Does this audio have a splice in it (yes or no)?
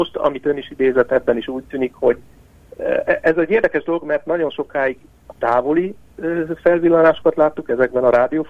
no